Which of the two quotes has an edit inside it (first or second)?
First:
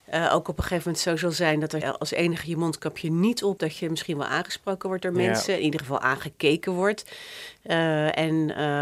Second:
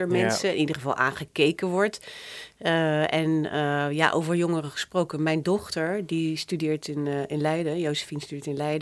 first